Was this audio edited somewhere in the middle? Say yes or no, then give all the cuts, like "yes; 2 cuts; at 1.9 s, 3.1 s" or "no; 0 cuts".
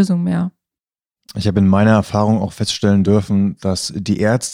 no; 0 cuts